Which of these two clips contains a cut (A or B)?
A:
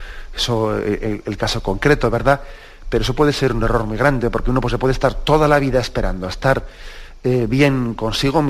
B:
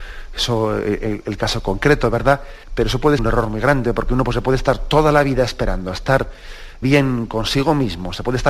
B